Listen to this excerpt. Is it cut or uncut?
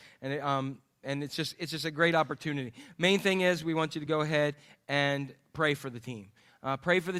uncut